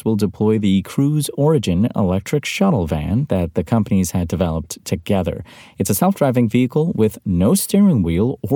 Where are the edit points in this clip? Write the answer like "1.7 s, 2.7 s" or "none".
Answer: none